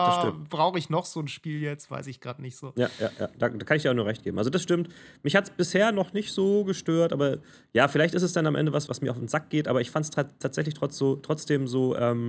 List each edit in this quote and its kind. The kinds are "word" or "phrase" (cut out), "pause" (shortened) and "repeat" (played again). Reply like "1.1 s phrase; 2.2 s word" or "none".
8.9 s word